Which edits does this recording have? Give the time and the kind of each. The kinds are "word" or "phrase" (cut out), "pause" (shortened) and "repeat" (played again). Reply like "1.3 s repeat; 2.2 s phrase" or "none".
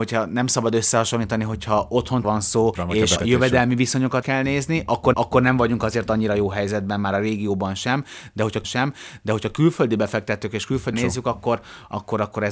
2.2 s word; 2.7 s word; 3.2 s word; 4.2 s word; 5.1 s repeat; 8.6 s repeat; 10.9 s word